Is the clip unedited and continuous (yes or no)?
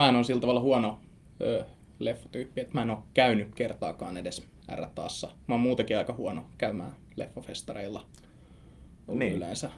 yes